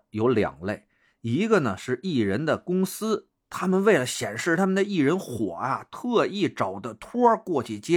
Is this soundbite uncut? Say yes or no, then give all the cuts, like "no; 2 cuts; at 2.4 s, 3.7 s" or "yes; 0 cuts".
yes; 0 cuts